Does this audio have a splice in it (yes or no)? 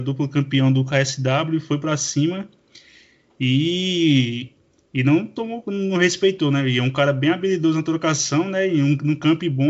no